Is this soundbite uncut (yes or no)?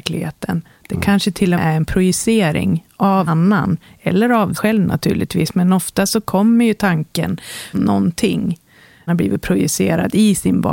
no